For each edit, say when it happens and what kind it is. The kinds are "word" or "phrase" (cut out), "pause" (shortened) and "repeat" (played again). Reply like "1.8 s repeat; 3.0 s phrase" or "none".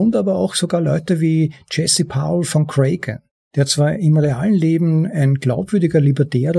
none